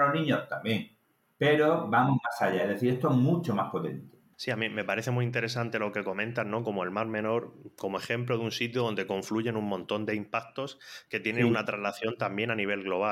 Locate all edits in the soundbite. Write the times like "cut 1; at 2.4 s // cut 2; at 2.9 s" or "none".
none